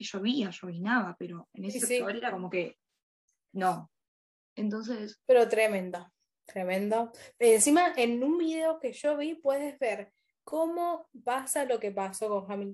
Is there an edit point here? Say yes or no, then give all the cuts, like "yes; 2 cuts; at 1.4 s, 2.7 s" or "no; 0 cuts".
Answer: no; 0 cuts